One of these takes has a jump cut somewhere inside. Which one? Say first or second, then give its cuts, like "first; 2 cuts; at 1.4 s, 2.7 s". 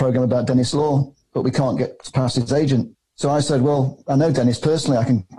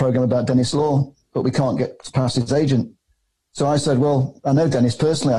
first; 1 cut; at 2.9 s